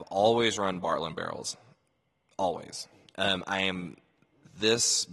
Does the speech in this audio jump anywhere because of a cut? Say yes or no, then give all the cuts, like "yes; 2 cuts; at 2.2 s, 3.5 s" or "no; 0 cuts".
no; 0 cuts